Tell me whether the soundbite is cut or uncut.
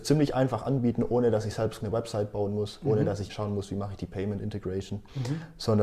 cut